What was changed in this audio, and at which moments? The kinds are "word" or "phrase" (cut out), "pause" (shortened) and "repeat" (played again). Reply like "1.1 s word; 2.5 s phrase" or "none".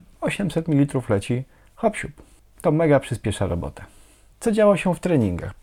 none